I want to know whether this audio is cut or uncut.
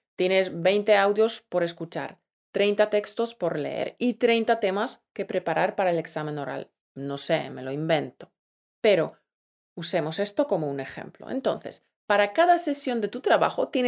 uncut